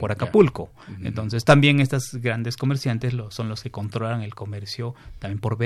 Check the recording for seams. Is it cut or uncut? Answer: uncut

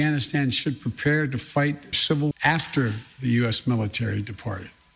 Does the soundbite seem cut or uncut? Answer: cut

